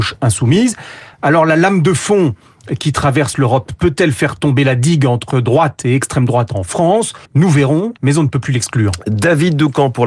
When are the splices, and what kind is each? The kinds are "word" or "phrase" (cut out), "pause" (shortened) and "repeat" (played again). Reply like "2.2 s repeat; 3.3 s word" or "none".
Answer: 7.2 s pause; 8.0 s pause